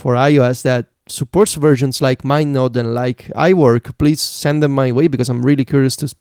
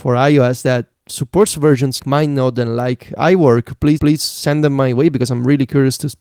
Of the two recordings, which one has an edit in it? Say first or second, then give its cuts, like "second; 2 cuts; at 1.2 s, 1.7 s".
second; 2 cuts; at 2.0 s, 4.0 s